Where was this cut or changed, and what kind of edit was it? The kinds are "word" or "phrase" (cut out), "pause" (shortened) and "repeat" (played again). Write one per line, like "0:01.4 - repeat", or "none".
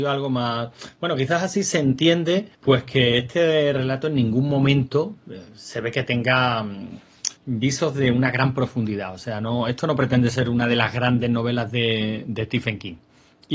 0:02.5 - pause
0:07.4 - pause